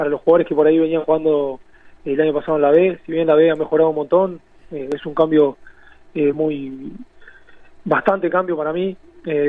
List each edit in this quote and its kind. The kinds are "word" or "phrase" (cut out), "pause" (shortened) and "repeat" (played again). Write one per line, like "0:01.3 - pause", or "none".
none